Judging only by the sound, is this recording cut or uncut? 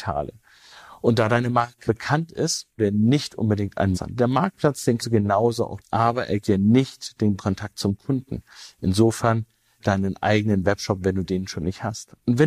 cut